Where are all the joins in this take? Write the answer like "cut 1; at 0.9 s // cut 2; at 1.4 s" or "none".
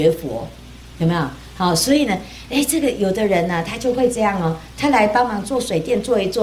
none